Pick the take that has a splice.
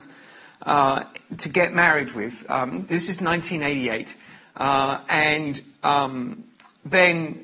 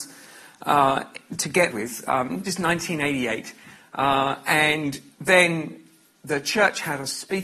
second; 3 cuts; at 1.7 s, 2.5 s, 5.1 s

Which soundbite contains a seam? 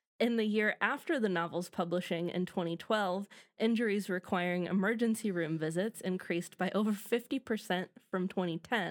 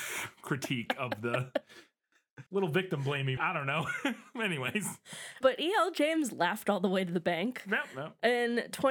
second; 3 cuts; at 2.5 s, 3.4 s, 5.4 s

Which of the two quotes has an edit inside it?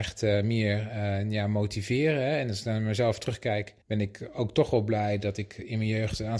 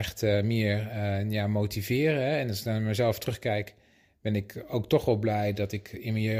first; 1 cut; at 3.8 s

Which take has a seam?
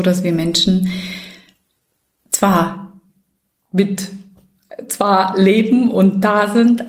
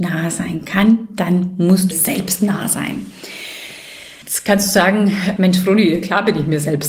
second; 3 cuts; at 1.9 s, 4.2 s, 5.4 s

